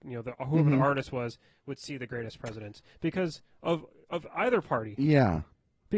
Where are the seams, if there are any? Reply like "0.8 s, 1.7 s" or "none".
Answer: none